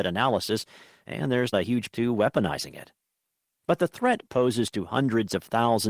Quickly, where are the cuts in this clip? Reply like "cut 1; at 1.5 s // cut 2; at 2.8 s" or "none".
cut 1; at 1.5 s // cut 2; at 1.9 s // cut 3; at 4.3 s